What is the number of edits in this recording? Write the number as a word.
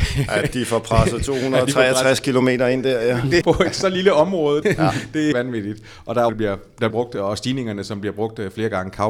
five